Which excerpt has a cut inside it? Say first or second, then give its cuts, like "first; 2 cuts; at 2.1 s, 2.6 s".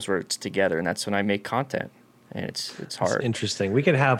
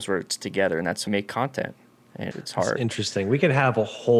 second; 2 cuts; at 1.1 s, 2.3 s